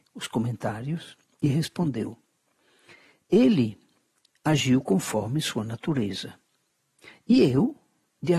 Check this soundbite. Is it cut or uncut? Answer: uncut